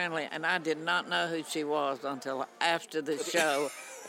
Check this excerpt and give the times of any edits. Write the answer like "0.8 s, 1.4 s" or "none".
none